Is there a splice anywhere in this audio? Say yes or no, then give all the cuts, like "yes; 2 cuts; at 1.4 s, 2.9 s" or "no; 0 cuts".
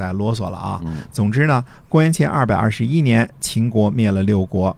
no; 0 cuts